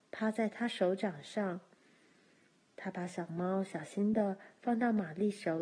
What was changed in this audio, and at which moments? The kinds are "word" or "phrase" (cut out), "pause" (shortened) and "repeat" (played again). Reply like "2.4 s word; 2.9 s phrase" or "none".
none